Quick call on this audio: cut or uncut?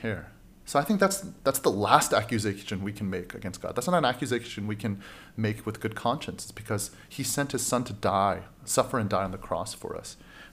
uncut